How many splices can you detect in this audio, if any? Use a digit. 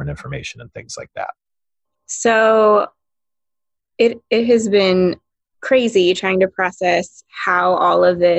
0